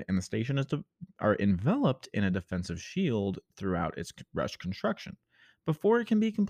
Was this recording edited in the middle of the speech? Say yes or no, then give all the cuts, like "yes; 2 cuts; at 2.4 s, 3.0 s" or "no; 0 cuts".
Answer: no; 0 cuts